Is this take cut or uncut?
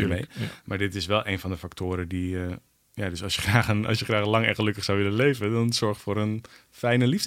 uncut